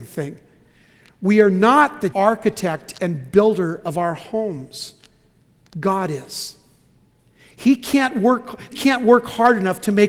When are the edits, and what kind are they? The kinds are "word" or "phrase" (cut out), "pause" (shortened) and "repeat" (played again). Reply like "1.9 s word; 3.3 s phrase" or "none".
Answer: 2.1 s word; 8.7 s word